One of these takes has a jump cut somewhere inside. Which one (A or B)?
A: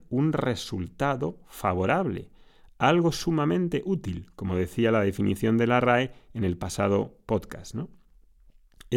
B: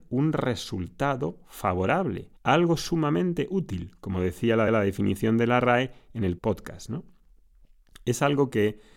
B